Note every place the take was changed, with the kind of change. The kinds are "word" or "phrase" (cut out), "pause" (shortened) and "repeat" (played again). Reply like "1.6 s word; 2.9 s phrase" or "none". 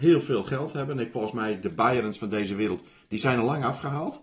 none

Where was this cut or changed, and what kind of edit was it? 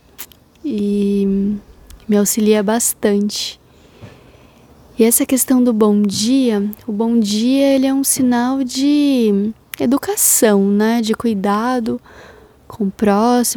none

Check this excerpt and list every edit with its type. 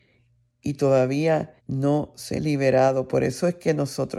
1.6 s pause; 2.4 s word

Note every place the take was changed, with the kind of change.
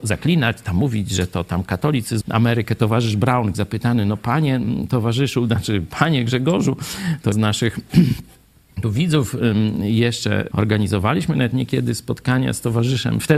2.2 s word; 3.5 s word; 7.3 s word; 10.5 s word

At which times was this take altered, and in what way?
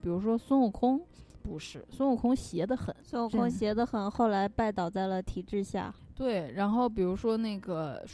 3.0 s pause

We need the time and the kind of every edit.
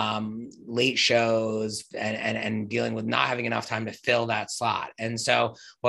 none

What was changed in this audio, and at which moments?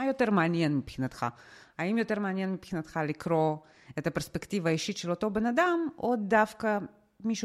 none

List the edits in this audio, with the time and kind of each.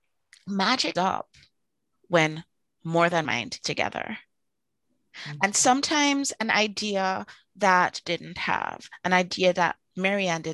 1.0 s word; 3.2 s word; 3.6 s word; 8.0 s word

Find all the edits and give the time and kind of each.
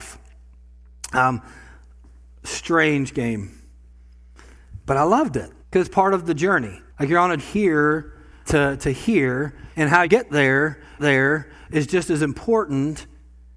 5.6 s pause; 6.9 s pause; 7.4 s phrase; 8.4 s word; 9.7 s pause; 10.0 s word; 11.0 s repeat

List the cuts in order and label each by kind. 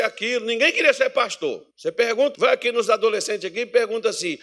1.7 s pause; 2.3 s word

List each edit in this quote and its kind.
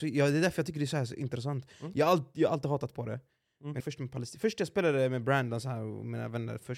3.8 s phrase

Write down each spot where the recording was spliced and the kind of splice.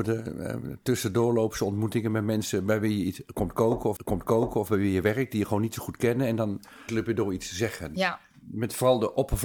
4.0 s repeat; 6.9 s word

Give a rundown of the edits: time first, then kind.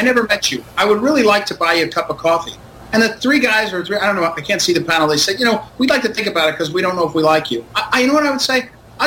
none

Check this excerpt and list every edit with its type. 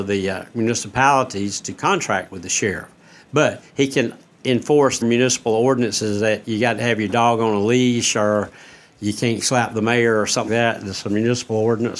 5.0 s word; 10.5 s word

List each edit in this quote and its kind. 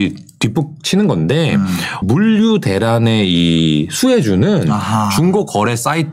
2.0 s phrase

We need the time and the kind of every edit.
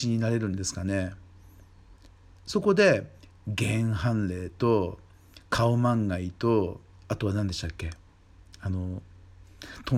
6.9 s pause

